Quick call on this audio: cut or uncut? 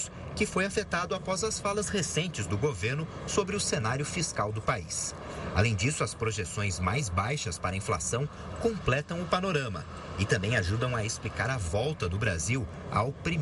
uncut